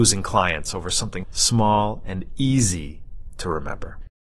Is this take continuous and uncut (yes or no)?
no